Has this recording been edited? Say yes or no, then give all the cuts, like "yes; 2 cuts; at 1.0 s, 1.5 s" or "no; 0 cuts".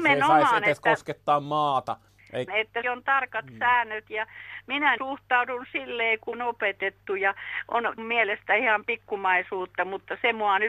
yes; 5 cuts; at 2.5 s, 2.8 s, 5.0 s, 6.3 s, 8.0 s